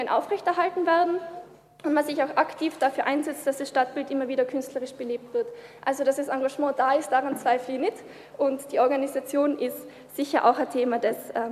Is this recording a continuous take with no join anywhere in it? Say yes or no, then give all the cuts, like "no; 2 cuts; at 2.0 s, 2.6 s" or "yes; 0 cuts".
yes; 0 cuts